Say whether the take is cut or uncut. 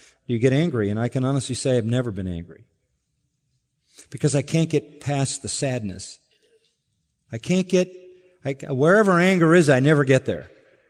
uncut